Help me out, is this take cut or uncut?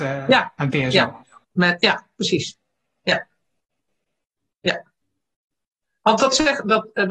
uncut